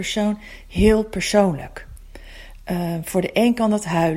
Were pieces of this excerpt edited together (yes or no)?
no